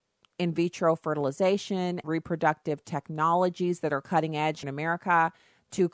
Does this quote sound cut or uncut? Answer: cut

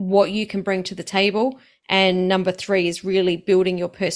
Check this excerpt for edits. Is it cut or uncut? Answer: uncut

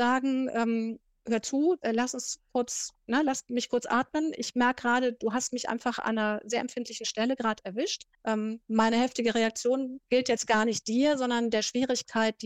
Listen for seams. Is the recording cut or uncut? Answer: cut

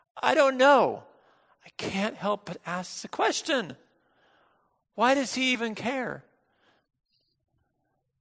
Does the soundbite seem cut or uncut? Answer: uncut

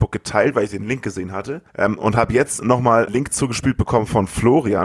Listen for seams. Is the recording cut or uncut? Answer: cut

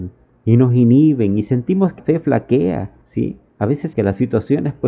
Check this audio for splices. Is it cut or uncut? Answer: cut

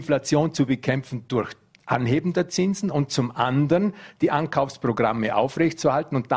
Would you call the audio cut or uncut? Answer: uncut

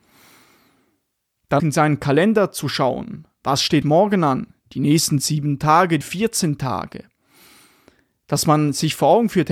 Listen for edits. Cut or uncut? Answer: cut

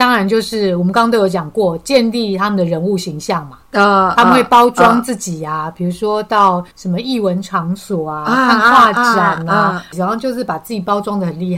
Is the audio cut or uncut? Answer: cut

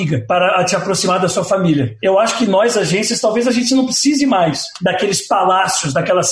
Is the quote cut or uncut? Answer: uncut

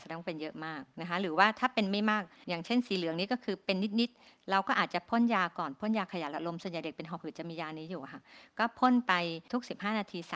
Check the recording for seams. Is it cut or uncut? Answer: uncut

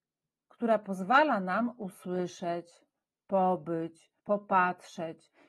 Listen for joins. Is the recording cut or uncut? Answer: cut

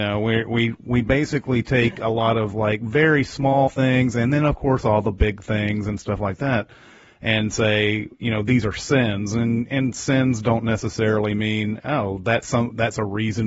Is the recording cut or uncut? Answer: uncut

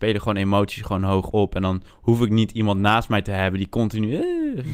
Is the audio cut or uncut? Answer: cut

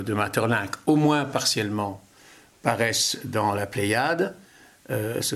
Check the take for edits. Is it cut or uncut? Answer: uncut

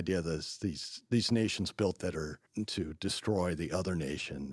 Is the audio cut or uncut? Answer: cut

